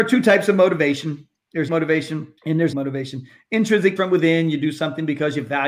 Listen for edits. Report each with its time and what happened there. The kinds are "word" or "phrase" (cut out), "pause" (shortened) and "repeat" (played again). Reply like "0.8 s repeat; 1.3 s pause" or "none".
1.7 s word; 2.4 s pause; 2.7 s word; 4.0 s word